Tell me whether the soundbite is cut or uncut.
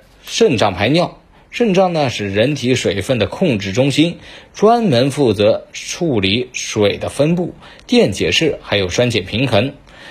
uncut